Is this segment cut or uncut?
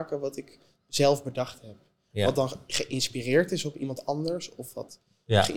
uncut